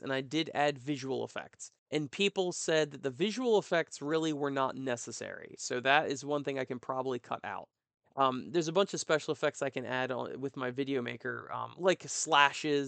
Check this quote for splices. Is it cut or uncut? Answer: cut